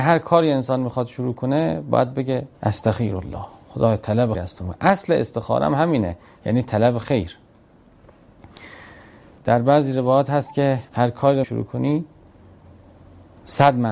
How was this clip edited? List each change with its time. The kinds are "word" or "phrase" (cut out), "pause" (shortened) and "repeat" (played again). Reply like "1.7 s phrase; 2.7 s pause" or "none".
2.5 s pause; 4.3 s word; 9.4 s word; 10.9 s pause; 11.4 s word